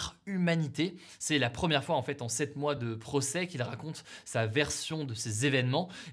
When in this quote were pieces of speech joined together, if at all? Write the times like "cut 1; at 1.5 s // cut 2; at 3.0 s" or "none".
none

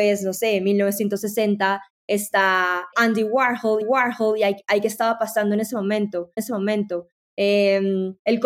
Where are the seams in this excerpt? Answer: cut 1; at 2.9 s // cut 2; at 3.8 s // cut 3; at 6.4 s

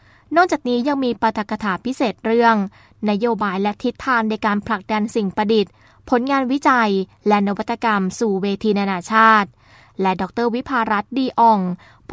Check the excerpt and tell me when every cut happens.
none

